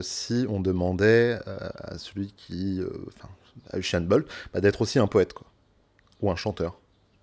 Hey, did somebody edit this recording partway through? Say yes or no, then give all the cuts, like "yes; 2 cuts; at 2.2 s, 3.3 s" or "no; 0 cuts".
no; 0 cuts